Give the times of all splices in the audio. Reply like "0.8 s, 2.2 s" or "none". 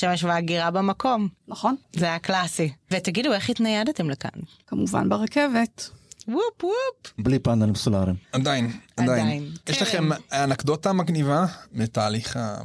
1.8 s, 8.2 s